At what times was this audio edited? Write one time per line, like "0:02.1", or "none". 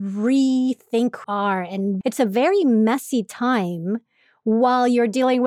0:01.2
0:02.0